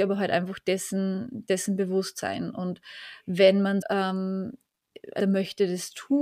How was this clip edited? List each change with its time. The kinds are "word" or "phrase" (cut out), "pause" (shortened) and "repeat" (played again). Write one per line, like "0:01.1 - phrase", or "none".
0:03.8 - word
0:05.2 - word